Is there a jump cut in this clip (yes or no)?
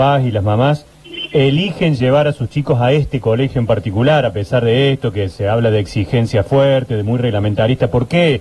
no